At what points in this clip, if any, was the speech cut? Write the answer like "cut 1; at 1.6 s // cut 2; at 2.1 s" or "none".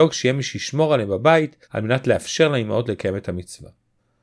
cut 1; at 1.6 s